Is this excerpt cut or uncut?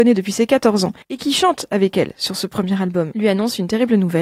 cut